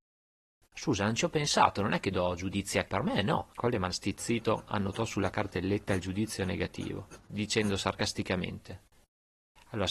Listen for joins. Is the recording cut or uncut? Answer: cut